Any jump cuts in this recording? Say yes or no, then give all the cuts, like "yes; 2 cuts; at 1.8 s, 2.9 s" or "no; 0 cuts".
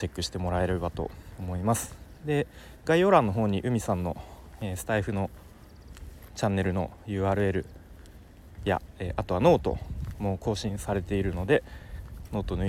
no; 0 cuts